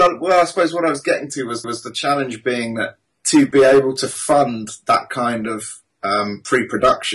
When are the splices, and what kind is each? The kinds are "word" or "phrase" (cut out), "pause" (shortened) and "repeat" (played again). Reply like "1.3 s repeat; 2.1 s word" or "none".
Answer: 1.6 s repeat; 3.0 s word